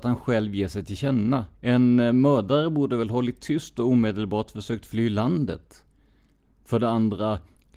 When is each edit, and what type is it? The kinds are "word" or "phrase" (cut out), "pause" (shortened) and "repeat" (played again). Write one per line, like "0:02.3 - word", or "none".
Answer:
0:01.5 - pause